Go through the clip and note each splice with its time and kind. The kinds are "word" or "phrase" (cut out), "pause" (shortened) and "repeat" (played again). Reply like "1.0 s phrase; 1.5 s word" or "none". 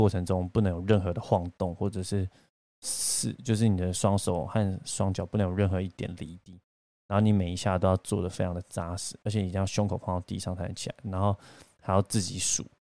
none